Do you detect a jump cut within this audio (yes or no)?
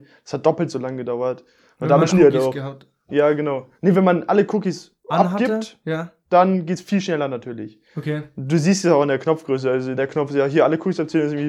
yes